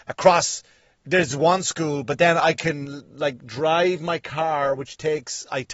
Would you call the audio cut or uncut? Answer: uncut